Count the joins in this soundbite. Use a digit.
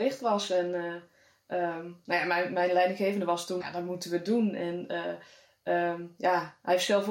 1